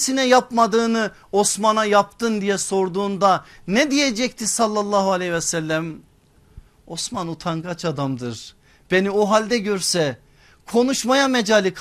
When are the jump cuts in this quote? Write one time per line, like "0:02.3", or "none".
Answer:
none

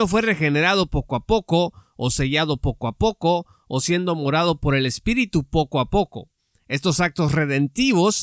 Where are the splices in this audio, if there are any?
none

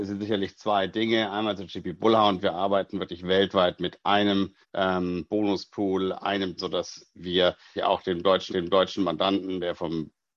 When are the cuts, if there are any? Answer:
0:04.6
0:06.6
0:07.8
0:08.5

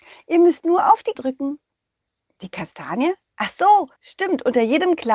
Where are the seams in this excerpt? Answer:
0:01.2
0:04.0

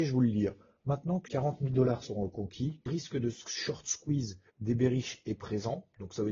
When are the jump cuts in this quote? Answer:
0:01.3
0:02.9
0:04.5

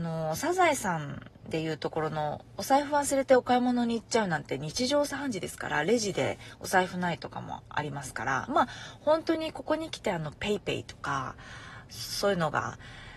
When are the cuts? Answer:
none

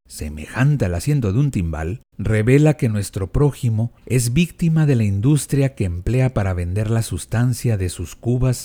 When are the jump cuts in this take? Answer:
0:02.1
0:04.0

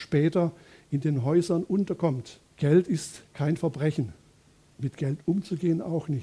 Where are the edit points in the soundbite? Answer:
0:02.5

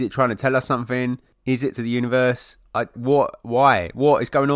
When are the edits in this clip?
0:01.7
0:02.9

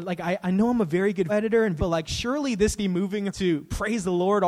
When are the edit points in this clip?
0:01.3
0:01.8
0:02.8
0:03.3

